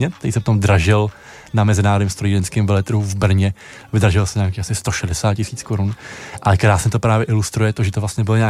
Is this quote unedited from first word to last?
yes; 0 cuts

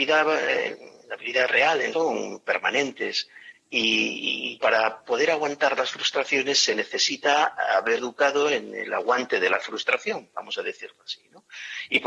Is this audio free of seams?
no; 3 cuts; at 1.9 s, 4.6 s, 8.0 s

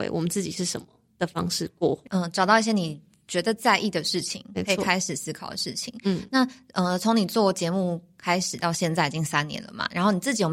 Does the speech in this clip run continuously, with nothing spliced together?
yes; 0 cuts

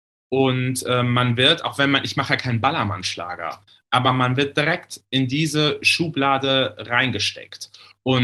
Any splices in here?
no; 0 cuts

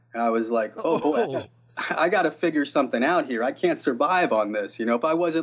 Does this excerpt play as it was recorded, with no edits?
yes; 0 cuts

